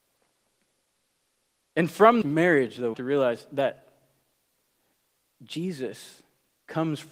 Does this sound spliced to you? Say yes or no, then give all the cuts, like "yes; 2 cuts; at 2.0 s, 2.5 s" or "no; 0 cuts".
yes; 2 cuts; at 2.2 s, 2.9 s